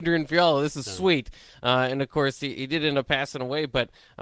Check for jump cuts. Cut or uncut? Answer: uncut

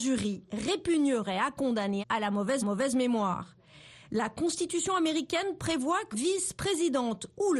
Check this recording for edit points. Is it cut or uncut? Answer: cut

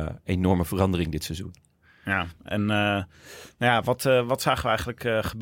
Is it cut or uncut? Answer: uncut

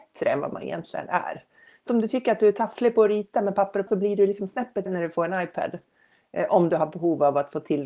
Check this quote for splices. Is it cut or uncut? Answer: cut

